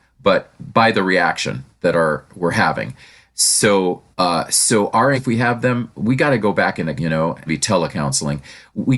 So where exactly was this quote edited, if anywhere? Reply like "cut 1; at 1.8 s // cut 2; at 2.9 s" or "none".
cut 1; at 1.8 s // cut 2; at 4.1 s // cut 3; at 5.1 s // cut 4; at 7.0 s // cut 5; at 7.5 s